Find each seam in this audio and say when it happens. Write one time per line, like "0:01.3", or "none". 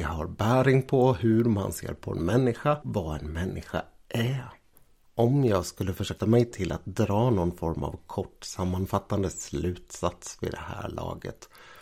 0:02.8
0:06.2